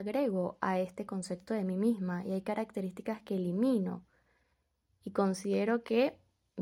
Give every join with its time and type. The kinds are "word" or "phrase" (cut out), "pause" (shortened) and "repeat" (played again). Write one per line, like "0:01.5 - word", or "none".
none